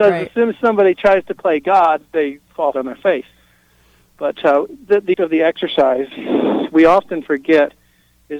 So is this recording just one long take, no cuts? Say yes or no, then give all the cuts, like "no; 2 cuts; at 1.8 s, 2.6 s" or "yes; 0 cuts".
no; 2 cuts; at 2.7 s, 5.1 s